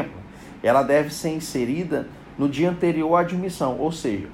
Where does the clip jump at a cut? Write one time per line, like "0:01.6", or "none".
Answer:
none